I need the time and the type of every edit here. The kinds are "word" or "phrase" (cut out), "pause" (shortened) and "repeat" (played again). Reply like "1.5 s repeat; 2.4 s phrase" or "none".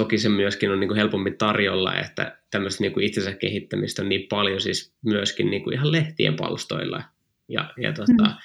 none